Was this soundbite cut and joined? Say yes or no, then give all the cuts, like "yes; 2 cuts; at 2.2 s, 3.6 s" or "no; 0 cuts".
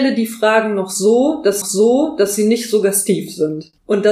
yes; 1 cut; at 1.6 s